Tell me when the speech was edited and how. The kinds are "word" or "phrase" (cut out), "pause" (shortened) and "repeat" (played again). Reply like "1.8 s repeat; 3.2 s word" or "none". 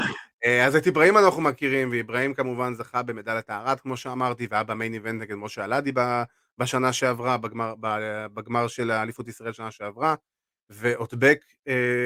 none